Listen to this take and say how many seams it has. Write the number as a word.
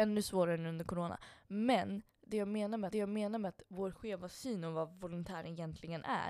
two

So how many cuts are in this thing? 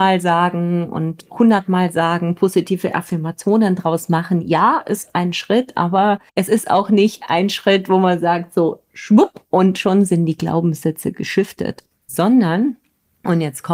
one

